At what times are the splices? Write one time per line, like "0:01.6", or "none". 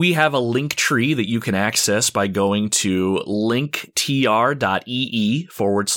none